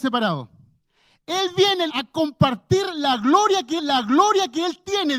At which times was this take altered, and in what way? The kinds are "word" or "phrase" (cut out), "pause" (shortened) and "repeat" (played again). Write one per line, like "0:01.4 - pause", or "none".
0:01.9 - word
0:03.8 - repeat